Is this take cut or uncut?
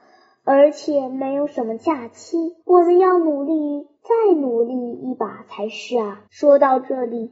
cut